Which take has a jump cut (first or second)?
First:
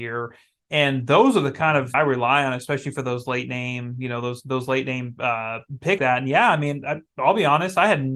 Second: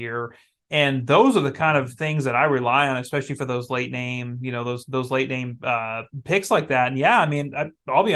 first